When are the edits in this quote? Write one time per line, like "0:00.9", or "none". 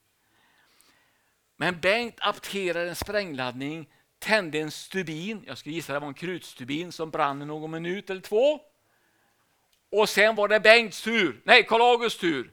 none